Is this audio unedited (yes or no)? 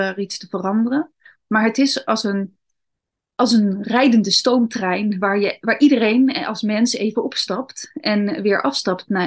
yes